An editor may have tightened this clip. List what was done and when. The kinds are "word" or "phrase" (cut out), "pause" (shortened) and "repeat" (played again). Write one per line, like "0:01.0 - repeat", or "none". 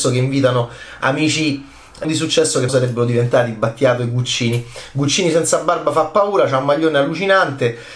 0:02.0 - phrase
0:02.7 - word